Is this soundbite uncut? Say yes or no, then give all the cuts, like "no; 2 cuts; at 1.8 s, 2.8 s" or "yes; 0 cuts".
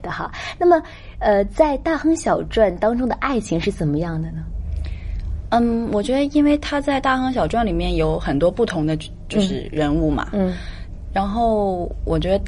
yes; 0 cuts